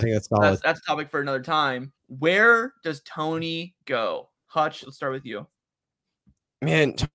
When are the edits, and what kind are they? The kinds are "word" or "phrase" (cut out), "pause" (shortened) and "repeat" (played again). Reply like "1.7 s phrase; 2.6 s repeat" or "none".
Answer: 2.0 s pause; 3.8 s pause